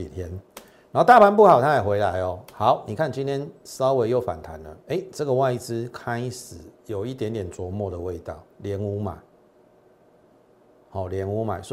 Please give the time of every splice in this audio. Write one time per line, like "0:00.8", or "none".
0:04.8
0:06.8
0:08.5